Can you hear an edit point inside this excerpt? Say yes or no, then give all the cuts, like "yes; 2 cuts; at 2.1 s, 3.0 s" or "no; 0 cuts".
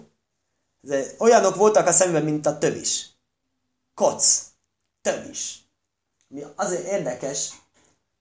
no; 0 cuts